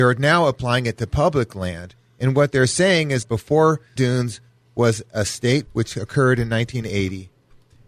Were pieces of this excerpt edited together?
yes; 3 cuts; at 3.2 s, 4.0 s, 5.7 s

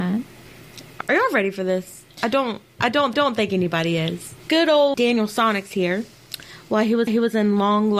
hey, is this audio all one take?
no; 5 cuts; at 1.0 s, 3.1 s, 4.4 s, 4.9 s, 7.1 s

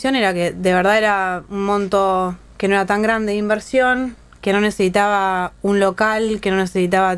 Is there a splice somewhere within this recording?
no; 0 cuts

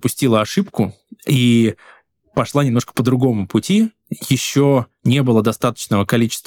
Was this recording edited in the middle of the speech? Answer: no; 0 cuts

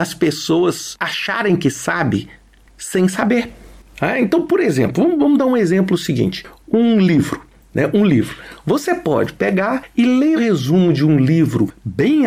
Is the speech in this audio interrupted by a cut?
yes; 1 cut; at 10.4 s

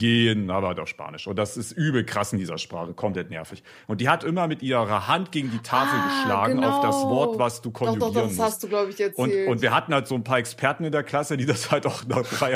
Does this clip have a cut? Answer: no; 0 cuts

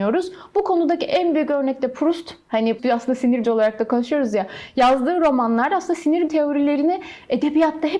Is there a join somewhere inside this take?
yes; 3 cuts; at 2.8 s, 3.4 s, 6.3 s

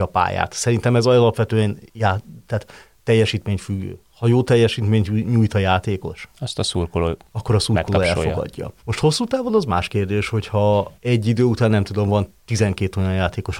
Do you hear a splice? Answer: yes; 4 cuts; at 1.9 s, 8.8 s, 11.0 s, 12.4 s

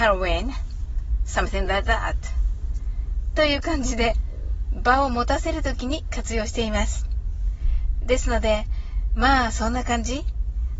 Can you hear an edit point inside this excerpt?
no; 0 cuts

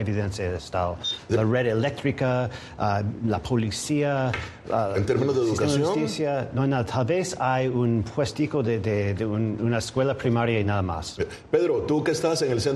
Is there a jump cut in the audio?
no; 0 cuts

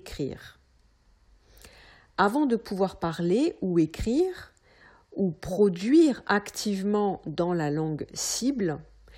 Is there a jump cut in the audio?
no; 0 cuts

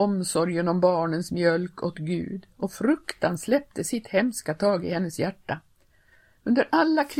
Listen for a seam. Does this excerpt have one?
no; 0 cuts

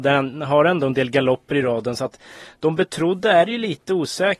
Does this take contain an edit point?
no; 0 cuts

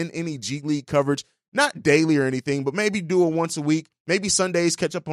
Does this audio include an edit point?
no; 0 cuts

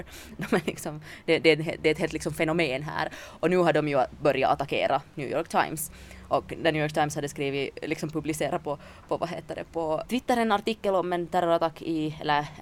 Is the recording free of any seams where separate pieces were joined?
no; 1 cut; at 10.1 s

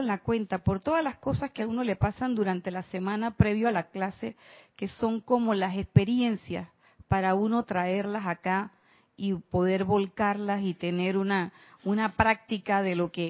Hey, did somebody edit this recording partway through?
no; 0 cuts

